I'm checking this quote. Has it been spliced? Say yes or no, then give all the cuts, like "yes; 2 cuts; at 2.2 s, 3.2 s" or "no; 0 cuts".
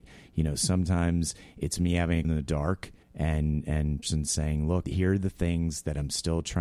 yes; 4 cuts; at 2.2 s, 3.0 s, 4.0 s, 4.8 s